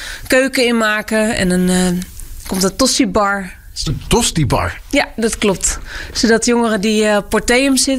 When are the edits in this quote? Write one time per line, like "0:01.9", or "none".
none